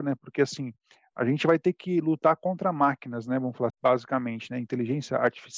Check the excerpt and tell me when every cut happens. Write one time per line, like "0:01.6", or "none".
0:03.7